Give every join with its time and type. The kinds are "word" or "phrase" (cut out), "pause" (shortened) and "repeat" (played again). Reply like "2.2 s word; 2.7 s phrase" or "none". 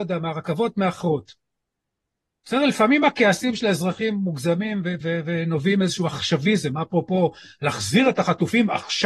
5.0 s word